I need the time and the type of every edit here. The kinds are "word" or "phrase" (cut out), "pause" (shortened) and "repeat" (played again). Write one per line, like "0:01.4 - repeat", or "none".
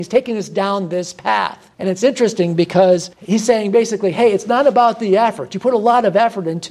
0:01.7 - pause
0:03.1 - pause